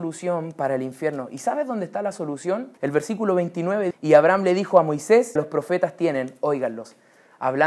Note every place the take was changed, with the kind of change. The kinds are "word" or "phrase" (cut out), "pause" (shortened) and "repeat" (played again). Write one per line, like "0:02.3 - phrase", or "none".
0:02.8 - pause
0:03.9 - word
0:05.4 - word